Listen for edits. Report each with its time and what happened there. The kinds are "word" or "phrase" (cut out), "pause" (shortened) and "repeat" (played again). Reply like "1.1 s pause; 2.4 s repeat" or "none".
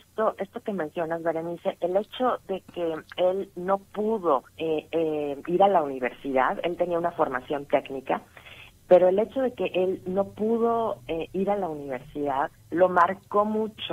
4.5 s pause; 12.6 s pause